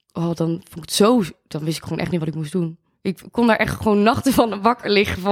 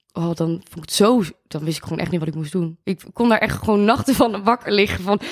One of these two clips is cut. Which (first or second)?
second